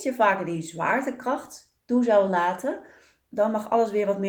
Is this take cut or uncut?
uncut